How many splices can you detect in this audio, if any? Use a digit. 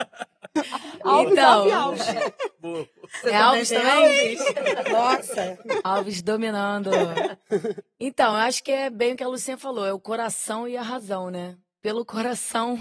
0